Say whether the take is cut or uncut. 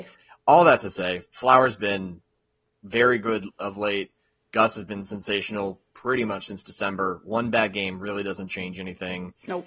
uncut